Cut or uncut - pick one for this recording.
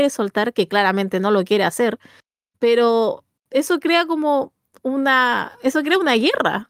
uncut